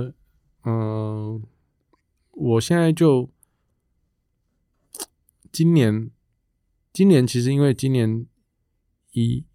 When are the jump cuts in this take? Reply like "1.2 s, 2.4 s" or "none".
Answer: none